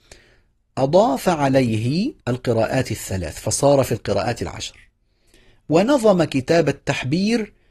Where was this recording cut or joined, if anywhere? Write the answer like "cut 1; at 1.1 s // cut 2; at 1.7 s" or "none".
cut 1; at 2.2 s